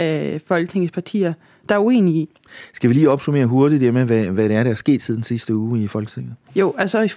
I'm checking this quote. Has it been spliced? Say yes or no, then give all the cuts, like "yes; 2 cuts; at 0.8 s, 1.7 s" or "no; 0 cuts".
no; 0 cuts